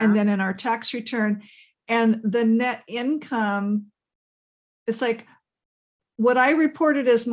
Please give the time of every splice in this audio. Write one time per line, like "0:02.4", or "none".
none